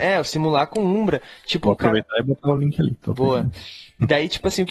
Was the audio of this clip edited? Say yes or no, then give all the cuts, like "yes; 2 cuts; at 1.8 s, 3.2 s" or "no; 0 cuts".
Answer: no; 0 cuts